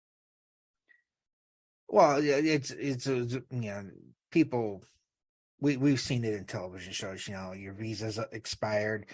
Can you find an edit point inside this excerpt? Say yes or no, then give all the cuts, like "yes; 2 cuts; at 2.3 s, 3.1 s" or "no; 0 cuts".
no; 0 cuts